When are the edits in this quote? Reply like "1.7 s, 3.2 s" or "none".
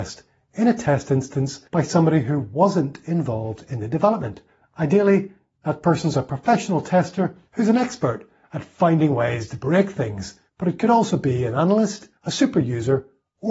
1.6 s, 4.5 s, 7.5 s, 10.5 s, 12.2 s